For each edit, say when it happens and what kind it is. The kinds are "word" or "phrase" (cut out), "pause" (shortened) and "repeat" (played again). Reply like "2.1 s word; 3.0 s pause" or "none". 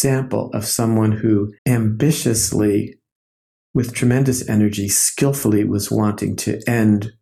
1.6 s pause

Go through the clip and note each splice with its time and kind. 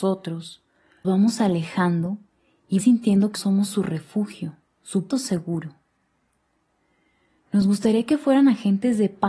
1.0 s word; 2.8 s word; 3.3 s word; 5.1 s word

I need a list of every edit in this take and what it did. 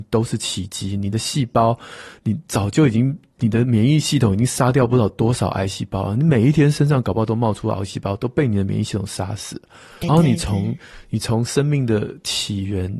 10.0 s word

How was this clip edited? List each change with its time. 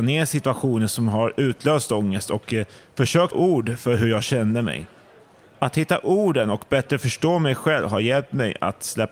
3.3 s word

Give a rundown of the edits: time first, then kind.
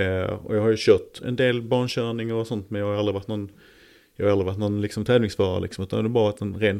1.2 s word

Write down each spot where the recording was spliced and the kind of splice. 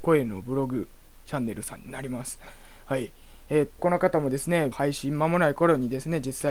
3.8 s word; 4.7 s word

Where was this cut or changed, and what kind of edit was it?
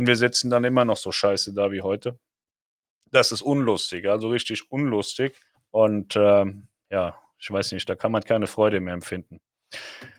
5.5 s pause

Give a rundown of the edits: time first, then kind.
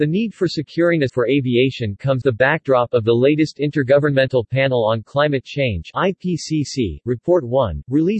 1.1 s phrase; 2.2 s word

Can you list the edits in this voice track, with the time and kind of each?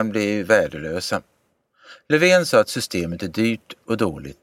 none

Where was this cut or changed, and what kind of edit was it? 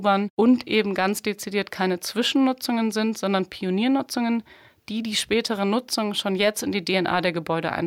none

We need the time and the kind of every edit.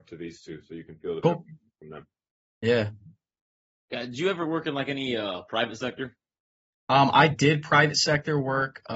none

